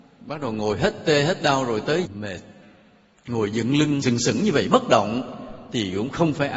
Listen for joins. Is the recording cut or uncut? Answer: cut